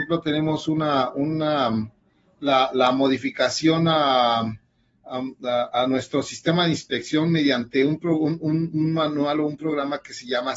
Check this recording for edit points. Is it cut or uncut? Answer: uncut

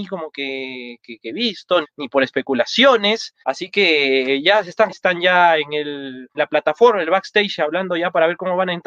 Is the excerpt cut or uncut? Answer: cut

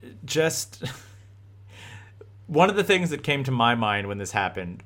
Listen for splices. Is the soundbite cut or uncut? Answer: uncut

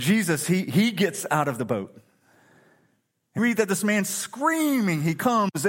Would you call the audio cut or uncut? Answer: cut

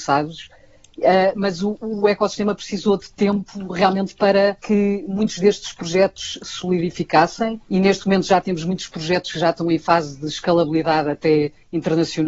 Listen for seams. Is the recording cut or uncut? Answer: cut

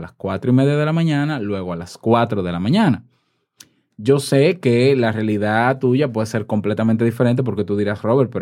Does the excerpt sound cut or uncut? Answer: uncut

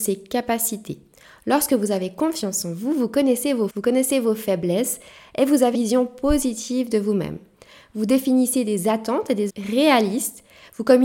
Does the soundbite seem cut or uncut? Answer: cut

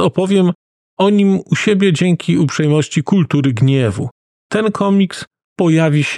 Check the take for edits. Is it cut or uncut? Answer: uncut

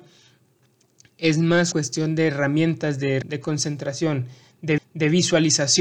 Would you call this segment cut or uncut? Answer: cut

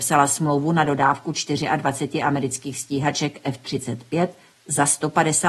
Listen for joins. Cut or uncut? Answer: uncut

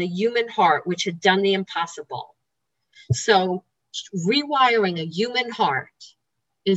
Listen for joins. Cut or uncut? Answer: uncut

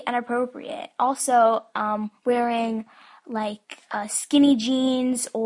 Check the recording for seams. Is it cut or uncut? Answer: uncut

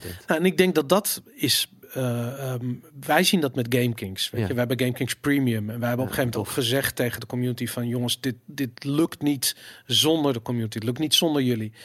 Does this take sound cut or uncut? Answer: uncut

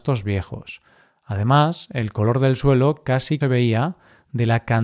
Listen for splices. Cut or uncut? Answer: cut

